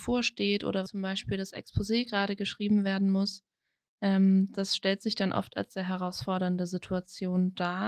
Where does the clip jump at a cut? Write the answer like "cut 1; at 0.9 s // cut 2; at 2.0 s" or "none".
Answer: none